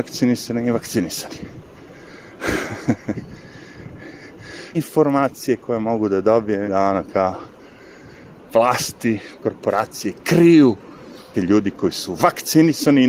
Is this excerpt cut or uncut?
cut